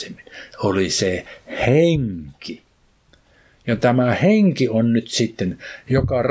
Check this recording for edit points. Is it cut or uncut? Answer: uncut